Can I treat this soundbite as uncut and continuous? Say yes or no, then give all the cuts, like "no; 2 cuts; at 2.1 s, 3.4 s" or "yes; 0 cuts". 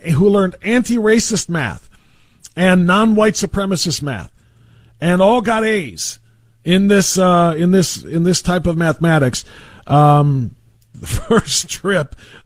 yes; 0 cuts